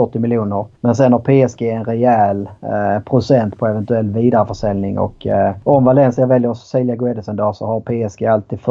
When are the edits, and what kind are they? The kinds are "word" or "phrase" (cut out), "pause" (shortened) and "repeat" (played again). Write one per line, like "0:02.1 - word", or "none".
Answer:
none